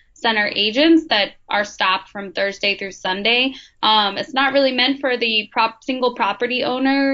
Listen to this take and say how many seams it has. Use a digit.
0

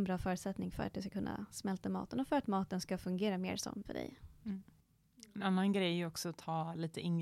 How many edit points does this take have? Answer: 1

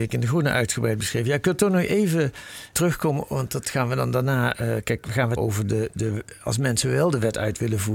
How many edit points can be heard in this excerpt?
2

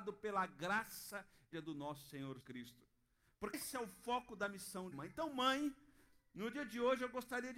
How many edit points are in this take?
4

